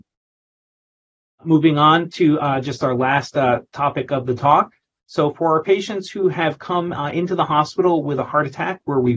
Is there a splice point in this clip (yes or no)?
no